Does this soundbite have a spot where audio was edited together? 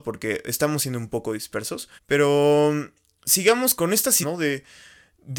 yes; 3 cuts; at 2.0 s, 3.8 s, 4.2 s

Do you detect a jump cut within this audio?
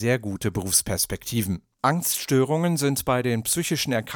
yes; 1 cut; at 1.7 s

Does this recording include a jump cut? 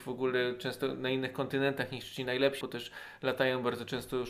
yes; 1 cut; at 2.6 s

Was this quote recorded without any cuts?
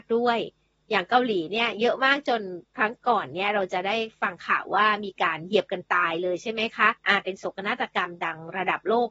no; 2 cuts; at 2.6 s, 7.0 s

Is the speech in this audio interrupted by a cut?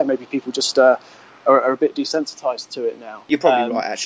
no; 0 cuts

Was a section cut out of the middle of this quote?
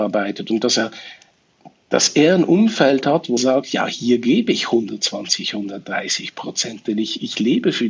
yes; 1 cut; at 3.4 s

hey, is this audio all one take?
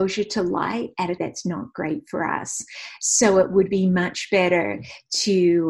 no; 1 cut; at 1.2 s

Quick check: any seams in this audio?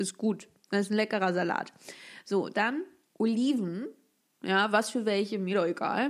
yes; 1 cut; at 3.0 s

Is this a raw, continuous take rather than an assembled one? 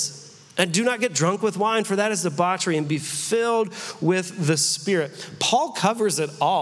yes; 0 cuts

